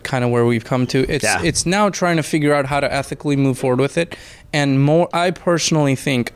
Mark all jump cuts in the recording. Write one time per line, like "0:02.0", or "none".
0:05.1